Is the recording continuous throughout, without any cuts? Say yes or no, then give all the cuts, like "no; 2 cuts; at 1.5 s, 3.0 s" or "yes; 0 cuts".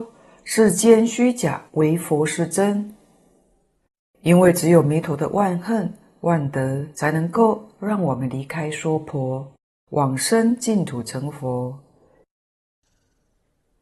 no; 2 cuts; at 1.7 s, 6.9 s